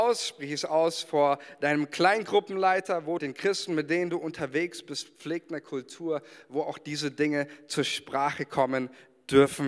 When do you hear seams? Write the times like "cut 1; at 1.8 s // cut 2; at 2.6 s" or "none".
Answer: cut 1; at 3.2 s

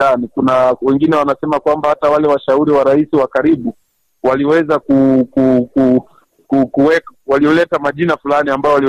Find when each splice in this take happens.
none

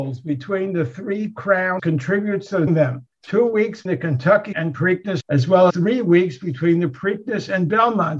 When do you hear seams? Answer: cut 1; at 1.8 s // cut 2; at 2.7 s // cut 3; at 3.1 s // cut 4; at 3.9 s // cut 5; at 4.5 s // cut 6; at 5.2 s // cut 7; at 5.7 s

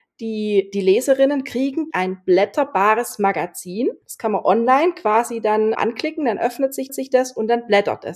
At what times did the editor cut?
cut 1; at 1.9 s // cut 2; at 4.0 s // cut 3; at 5.7 s // cut 4; at 6.9 s

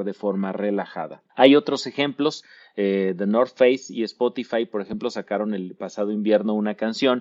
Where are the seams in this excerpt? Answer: cut 1; at 1.3 s

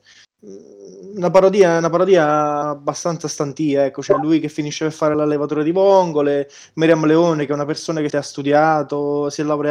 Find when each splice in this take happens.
cut 1; at 2.6 s // cut 2; at 5.1 s // cut 3; at 8.1 s

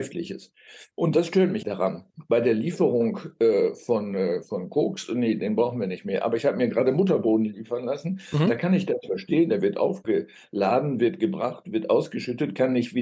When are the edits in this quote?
cut 1; at 0.9 s // cut 2; at 1.6 s

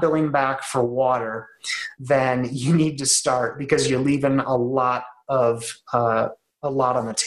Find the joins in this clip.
none

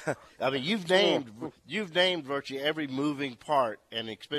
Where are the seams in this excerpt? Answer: none

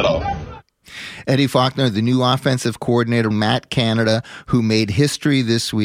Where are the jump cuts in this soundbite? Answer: cut 1; at 3.3 s

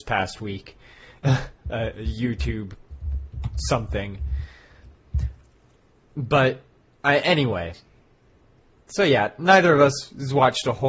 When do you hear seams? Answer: none

